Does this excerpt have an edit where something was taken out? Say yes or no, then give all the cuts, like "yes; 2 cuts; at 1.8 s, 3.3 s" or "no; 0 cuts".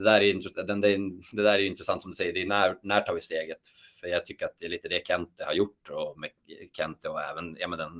no; 0 cuts